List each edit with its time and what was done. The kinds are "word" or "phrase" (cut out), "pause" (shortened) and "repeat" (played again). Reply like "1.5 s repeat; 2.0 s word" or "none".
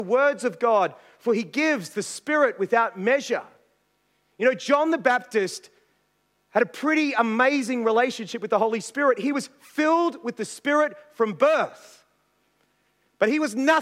none